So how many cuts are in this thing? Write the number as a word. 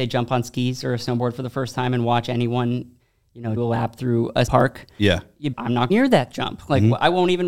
four